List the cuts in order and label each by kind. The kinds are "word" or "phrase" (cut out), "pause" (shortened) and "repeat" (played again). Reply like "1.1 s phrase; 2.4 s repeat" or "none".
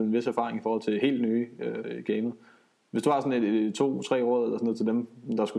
none